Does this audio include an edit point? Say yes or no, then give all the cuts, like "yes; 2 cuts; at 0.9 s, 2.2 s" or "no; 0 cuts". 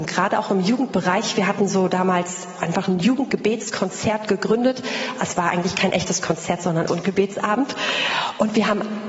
yes; 1 cut; at 6.9 s